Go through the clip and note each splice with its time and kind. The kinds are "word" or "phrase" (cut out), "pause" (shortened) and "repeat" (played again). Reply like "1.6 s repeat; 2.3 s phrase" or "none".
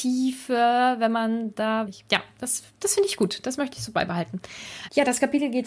1.9 s phrase